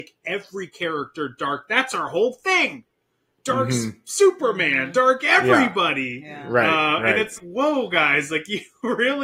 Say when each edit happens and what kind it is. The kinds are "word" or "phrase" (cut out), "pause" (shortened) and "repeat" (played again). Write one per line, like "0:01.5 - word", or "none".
0:07.4 - word